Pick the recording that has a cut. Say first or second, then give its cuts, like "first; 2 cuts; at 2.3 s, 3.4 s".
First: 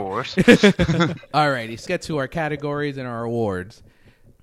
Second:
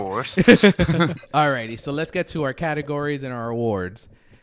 first; 1 cut; at 1.9 s